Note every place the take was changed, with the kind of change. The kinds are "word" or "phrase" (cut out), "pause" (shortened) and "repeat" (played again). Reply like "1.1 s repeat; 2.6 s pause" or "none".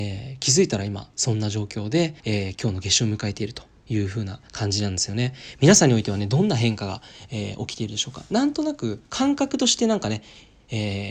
2.2 s pause; 4.5 s pause; 9.1 s pause

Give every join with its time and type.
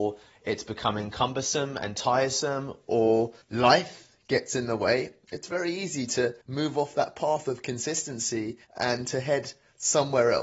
3.4 s pause; 6.4 s pause; 8.6 s pause

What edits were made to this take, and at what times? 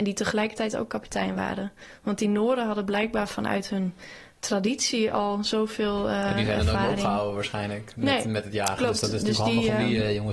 none

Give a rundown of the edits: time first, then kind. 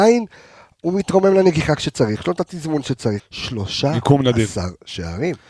3.2 s phrase

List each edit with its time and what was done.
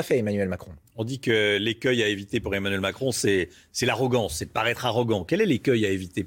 none

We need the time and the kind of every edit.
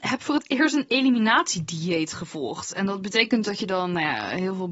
3.4 s word

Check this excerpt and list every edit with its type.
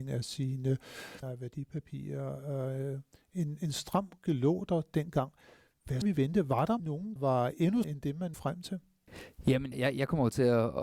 1.2 s word; 4.2 s word; 6.0 s word; 6.8 s word; 7.2 s word; 7.8 s word; 8.3 s word; 9.7 s word

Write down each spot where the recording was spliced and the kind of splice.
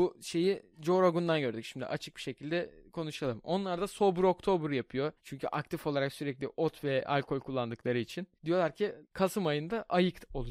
5.2 s pause; 8.3 s pause; 9.0 s pause

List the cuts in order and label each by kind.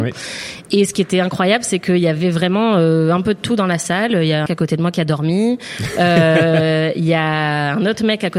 4.5 s phrase

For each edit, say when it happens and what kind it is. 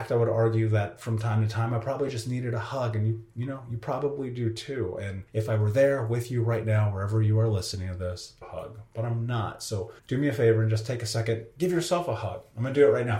5.3 s pause; 8.4 s phrase; 10.0 s pause

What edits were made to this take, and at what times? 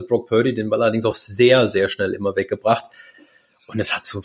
none

